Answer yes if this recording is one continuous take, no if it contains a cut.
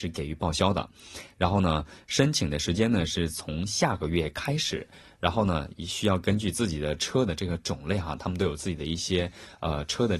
yes